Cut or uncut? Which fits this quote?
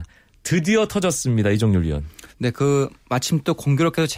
cut